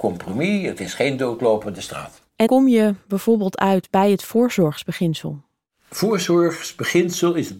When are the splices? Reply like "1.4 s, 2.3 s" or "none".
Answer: 2.5 s

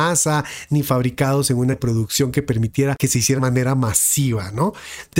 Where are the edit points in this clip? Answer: 1.7 s, 3.4 s

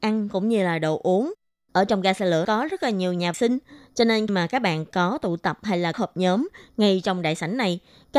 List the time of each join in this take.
2.4 s, 3.3 s, 4.3 s, 5.9 s

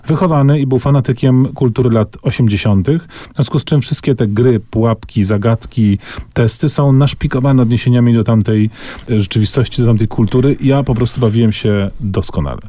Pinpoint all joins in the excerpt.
none

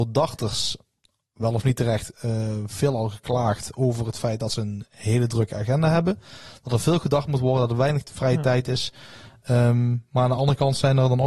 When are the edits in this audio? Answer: none

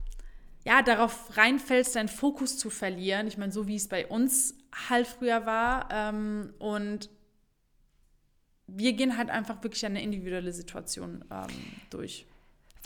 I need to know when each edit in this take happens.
none

